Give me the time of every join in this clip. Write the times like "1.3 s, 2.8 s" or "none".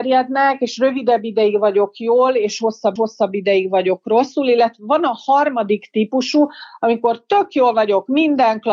3.0 s